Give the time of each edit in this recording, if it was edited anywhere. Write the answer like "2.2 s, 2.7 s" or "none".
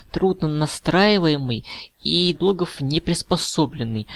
2.3 s

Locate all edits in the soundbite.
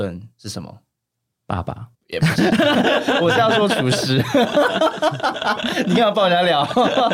1.9 s

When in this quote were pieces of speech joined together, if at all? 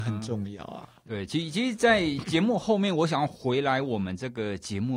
none

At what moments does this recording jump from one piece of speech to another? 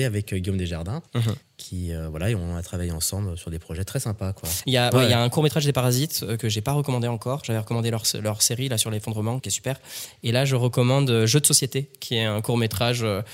1.1 s, 1.4 s, 9.4 s

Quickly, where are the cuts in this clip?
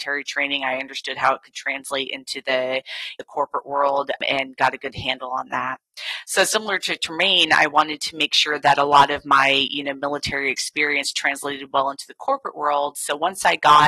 none

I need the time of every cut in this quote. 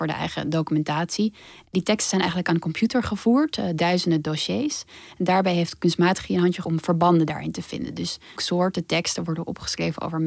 3.8 s, 6.3 s, 6.6 s, 8.4 s

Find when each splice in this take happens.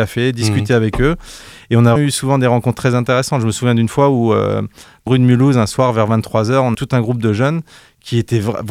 2.0 s, 5.1 s, 6.7 s

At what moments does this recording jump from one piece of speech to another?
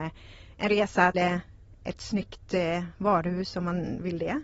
1.1 s

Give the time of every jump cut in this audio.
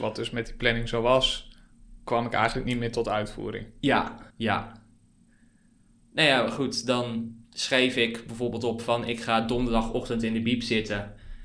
4.3 s, 7.4 s

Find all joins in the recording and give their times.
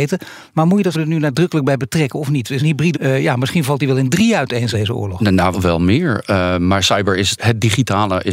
0.9 s, 2.6 s, 2.9 s, 4.7 s, 5.5 s, 7.4 s

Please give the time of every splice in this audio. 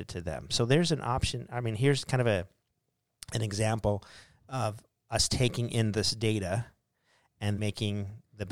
7.6 s

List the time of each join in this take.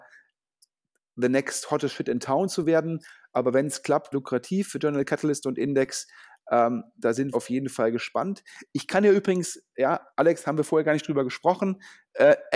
4.1 s, 7.3 s, 10.1 s

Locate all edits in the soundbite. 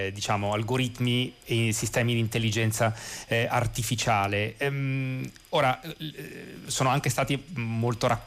6.7 s

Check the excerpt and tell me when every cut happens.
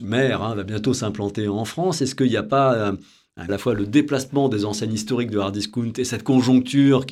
3.5 s

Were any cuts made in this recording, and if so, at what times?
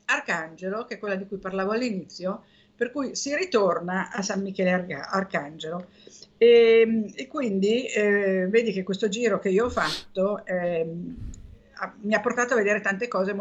none

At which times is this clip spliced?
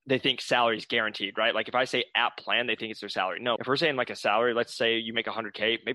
3.6 s

